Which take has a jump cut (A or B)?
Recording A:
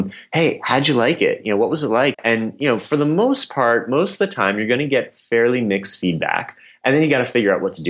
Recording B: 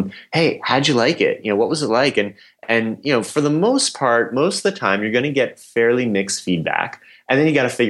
A